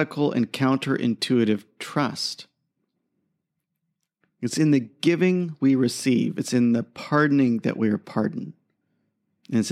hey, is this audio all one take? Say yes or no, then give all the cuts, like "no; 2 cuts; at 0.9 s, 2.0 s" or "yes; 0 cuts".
yes; 0 cuts